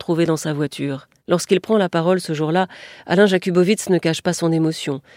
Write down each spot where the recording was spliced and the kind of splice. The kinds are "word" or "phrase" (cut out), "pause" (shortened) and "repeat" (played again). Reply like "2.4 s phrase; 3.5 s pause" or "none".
1.2 s pause